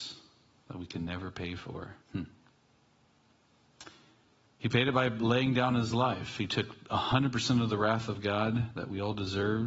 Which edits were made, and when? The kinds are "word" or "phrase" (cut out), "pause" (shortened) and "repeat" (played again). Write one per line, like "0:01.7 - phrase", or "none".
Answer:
0:02.0 - pause